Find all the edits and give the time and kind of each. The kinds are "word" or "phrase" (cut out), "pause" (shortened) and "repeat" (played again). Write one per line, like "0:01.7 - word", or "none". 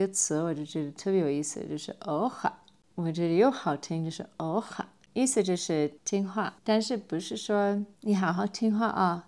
0:06.0 - pause
0:06.6 - pause